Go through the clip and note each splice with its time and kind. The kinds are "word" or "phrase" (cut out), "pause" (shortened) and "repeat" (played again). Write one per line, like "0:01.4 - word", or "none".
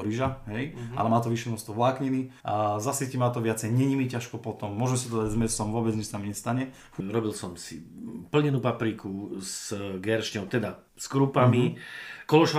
0:02.4 - pause
0:10.9 - pause